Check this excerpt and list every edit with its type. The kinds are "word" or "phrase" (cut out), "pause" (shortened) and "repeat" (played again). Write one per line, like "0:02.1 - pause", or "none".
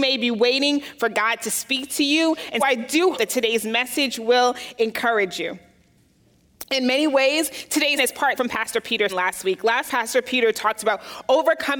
0:02.6 - word
0:03.1 - word
0:08.0 - word
0:08.4 - word
0:09.1 - word
0:09.9 - word